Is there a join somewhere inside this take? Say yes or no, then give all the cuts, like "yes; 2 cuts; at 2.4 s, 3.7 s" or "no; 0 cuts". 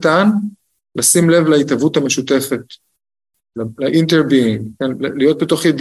no; 0 cuts